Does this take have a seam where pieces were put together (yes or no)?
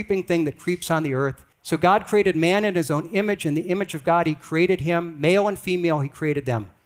yes